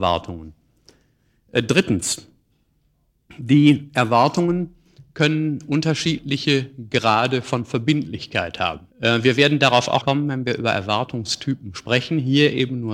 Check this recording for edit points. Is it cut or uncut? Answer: cut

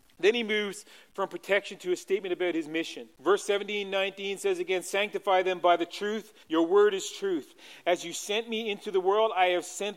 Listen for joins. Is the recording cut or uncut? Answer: cut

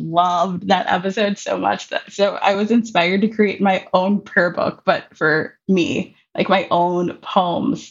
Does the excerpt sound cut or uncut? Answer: uncut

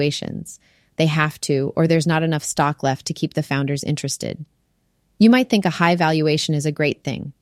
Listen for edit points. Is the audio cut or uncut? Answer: uncut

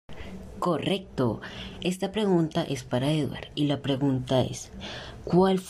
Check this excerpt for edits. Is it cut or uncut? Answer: uncut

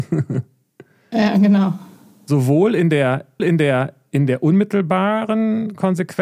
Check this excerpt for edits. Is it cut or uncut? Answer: cut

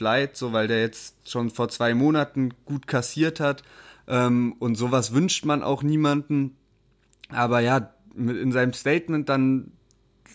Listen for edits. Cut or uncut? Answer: uncut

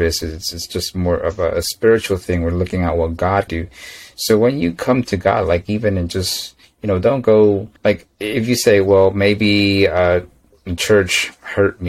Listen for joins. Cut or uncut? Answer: cut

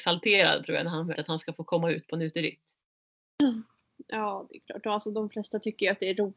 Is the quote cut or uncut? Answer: cut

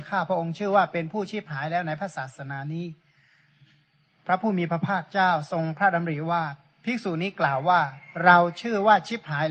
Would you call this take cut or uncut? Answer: uncut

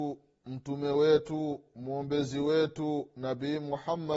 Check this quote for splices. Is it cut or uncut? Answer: uncut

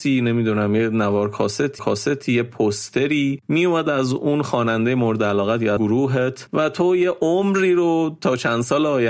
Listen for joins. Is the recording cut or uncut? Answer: cut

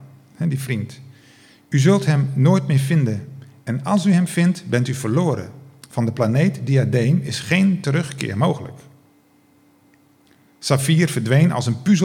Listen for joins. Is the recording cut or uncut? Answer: uncut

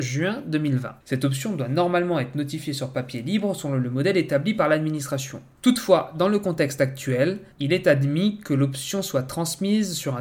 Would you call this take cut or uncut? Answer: cut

